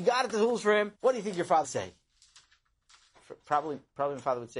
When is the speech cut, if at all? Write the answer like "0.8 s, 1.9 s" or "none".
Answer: 0.9 s, 1.6 s